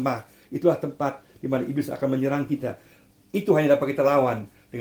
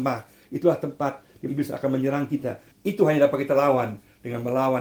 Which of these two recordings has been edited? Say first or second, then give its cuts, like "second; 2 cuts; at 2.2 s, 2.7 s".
second; 2 cuts; at 1.5 s, 2.7 s